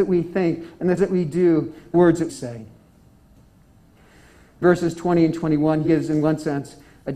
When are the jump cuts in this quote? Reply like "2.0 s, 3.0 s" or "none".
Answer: 1.0 s, 1.9 s, 2.3 s, 4.6 s, 5.8 s

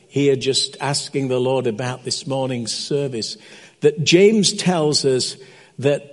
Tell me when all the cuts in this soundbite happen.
none

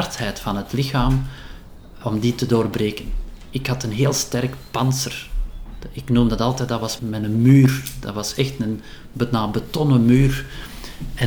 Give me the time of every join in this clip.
2.0 s, 7.0 s

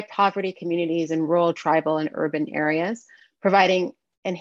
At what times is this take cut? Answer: none

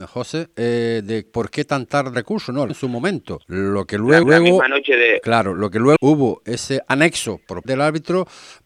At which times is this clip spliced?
1.3 s, 2.1 s, 2.7 s, 3.4 s, 4.2 s, 6.0 s, 6.4 s, 7.6 s

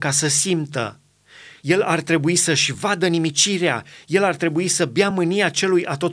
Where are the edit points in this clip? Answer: none

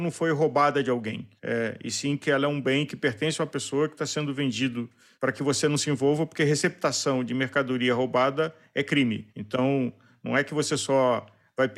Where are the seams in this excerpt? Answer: none

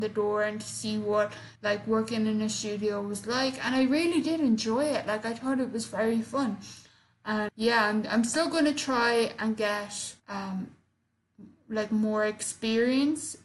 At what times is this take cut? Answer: 1.5 s, 7.5 s, 10.2 s

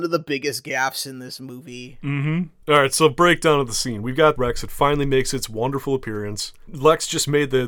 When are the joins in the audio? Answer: 4.4 s

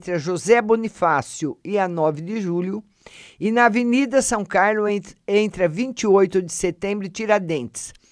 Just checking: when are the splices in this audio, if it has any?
none

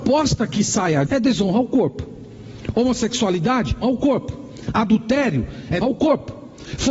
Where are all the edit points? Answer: 1.1 s, 3.8 s, 5.8 s

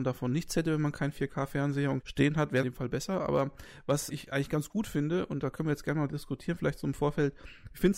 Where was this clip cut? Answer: 2.0 s, 2.6 s, 4.1 s

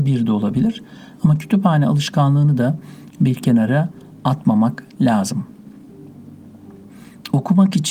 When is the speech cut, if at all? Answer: none

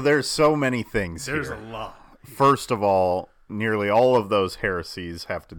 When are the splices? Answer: none

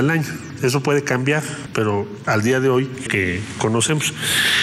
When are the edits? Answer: 3.1 s

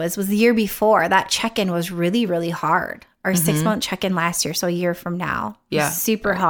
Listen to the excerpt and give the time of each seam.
none

